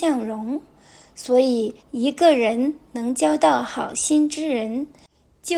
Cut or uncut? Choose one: cut